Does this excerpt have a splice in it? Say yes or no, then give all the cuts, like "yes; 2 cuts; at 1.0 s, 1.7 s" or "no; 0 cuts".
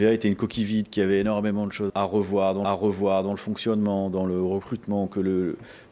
yes; 2 cuts; at 1.9 s, 2.6 s